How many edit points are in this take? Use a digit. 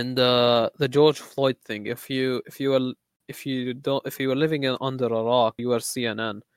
1